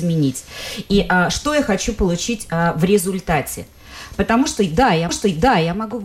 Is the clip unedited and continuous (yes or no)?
no